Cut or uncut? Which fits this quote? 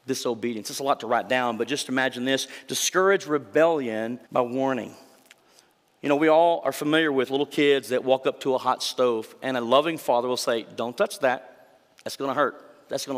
cut